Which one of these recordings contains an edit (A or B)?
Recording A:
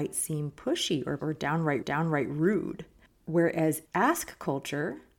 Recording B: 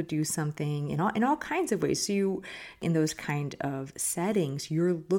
A